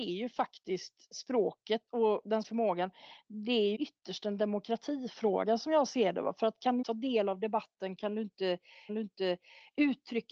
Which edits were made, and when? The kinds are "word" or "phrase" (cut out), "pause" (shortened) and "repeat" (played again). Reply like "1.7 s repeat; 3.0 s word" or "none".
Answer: 1.9 s pause; 2.4 s word; 3.7 s word; 6.8 s word; 8.9 s repeat